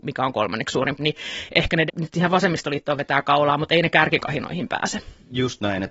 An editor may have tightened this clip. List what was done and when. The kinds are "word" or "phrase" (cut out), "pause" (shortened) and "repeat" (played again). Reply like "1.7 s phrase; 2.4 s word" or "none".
1.0 s word; 1.9 s word